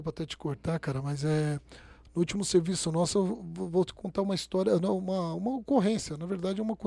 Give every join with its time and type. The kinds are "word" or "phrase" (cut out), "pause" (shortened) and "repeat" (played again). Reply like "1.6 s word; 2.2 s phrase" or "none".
none